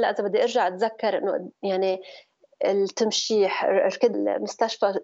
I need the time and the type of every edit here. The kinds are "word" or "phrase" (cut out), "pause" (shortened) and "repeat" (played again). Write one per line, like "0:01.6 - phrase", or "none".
0:04.1 - word